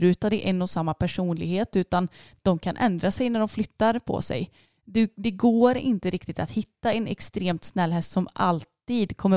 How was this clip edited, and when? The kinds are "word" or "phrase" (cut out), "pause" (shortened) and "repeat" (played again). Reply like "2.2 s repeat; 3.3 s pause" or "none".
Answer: none